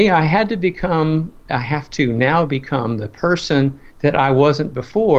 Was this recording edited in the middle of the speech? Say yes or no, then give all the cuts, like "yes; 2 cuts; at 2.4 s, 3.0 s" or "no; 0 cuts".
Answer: yes; 1 cut; at 3.9 s